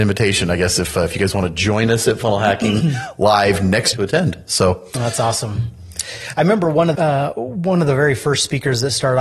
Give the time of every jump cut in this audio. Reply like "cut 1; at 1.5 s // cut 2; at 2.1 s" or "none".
cut 1; at 3.9 s // cut 2; at 7.0 s